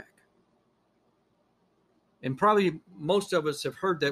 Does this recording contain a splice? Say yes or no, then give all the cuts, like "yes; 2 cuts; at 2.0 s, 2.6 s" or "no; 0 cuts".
yes; 1 cut; at 2.9 s